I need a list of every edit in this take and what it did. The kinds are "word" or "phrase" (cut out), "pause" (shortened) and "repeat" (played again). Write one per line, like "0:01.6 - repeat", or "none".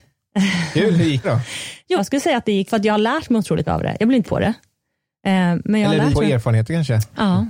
0:01.2 - word
0:02.0 - word
0:02.7 - word
0:03.7 - word
0:04.2 - word
0:06.1 - word